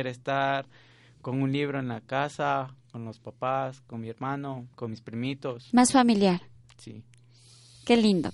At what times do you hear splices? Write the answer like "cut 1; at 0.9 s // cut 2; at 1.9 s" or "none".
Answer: cut 1; at 4.7 s

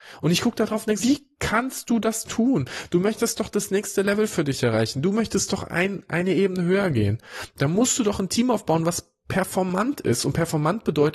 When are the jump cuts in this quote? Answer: cut 1; at 1.0 s

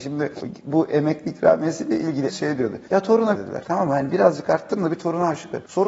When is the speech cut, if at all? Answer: cut 1; at 2.3 s // cut 2; at 3.3 s

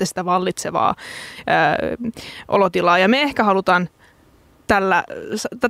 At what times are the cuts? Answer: none

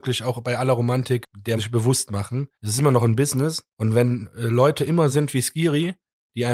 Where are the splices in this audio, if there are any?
cut 1; at 1.2 s // cut 2; at 1.6 s // cut 3; at 2.5 s // cut 4; at 3.7 s // cut 5; at 5.1 s

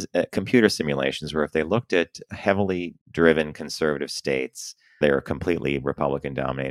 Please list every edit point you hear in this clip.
cut 1; at 3.0 s // cut 2; at 5.0 s

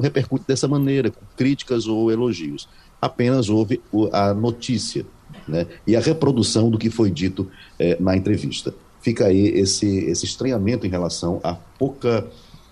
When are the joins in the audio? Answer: none

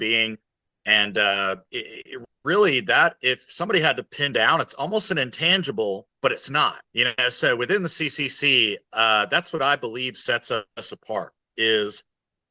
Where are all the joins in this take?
cut 1; at 1.6 s // cut 2; at 6.2 s // cut 3; at 6.9 s

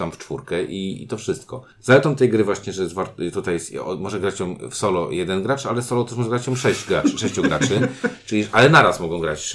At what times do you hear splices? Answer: cut 1; at 1.7 s

